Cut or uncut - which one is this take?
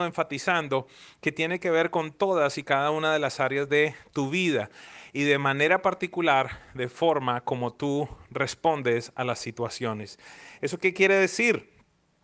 uncut